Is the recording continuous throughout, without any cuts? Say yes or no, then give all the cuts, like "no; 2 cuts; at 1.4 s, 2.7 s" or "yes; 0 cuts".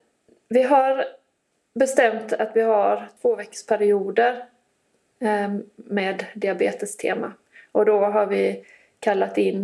yes; 0 cuts